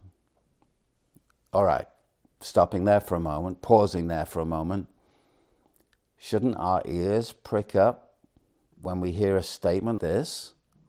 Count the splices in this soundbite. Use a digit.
1